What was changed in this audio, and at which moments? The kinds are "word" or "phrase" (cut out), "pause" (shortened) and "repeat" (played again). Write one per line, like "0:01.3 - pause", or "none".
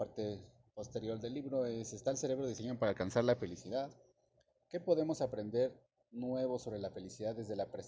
none

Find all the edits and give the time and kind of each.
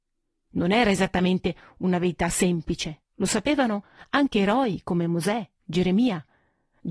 0:03.1 - pause

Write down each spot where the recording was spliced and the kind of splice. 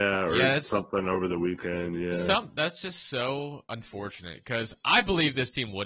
none

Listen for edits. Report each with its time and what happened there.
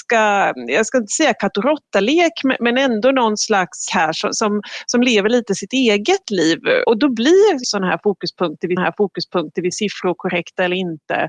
0:03.9 - phrase
0:06.8 - word
0:07.6 - word
0:08.8 - repeat

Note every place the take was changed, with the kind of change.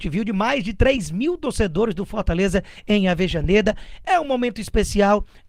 none

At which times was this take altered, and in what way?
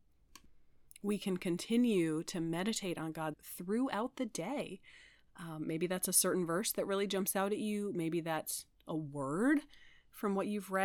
0:03.3 - word

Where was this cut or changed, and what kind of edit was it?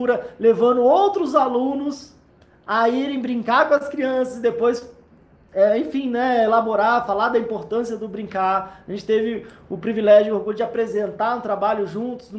none

